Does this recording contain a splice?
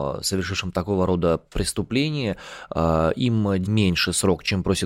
yes; 1 cut; at 3.6 s

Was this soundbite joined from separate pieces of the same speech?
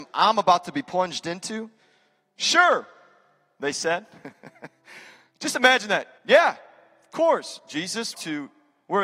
yes; 2 cuts; at 6.2 s, 8.1 s

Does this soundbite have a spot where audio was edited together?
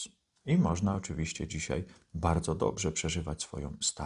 no; 0 cuts

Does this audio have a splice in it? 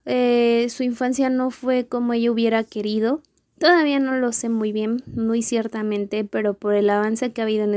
no; 0 cuts

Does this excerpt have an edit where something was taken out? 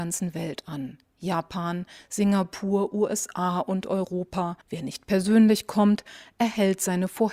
yes; 1 cut; at 4.6 s

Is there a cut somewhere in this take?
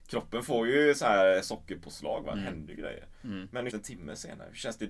yes; 1 cut; at 3.7 s

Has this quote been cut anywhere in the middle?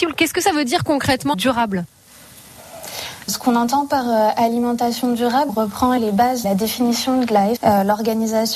yes; 6 cuts; at 1.3 s, 3.3 s, 5.5 s, 6.0 s, 6.4 s, 7.6 s

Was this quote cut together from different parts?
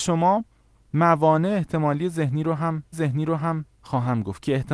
yes; 1 cut; at 2.9 s

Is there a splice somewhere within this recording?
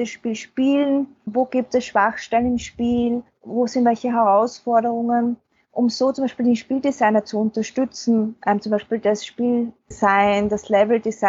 no; 0 cuts

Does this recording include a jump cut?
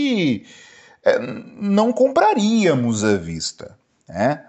no; 0 cuts

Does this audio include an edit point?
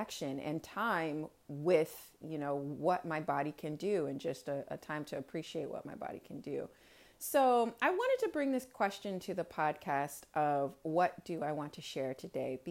no; 0 cuts

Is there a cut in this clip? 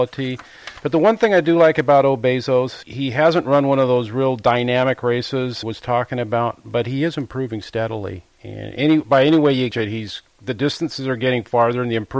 yes; 4 cuts; at 2.8 s, 5.6 s, 8.3 s, 9.7 s

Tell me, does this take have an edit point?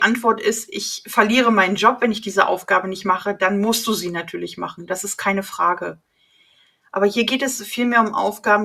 no; 0 cuts

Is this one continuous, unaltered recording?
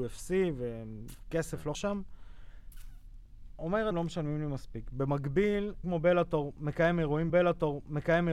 no; 4 cuts; at 1.7 s, 3.9 s, 5.8 s, 7.3 s

